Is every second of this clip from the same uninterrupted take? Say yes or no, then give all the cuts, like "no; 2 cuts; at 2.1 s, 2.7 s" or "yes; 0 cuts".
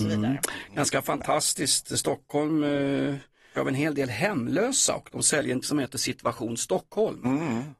no; 2 cuts; at 3.5 s, 5.6 s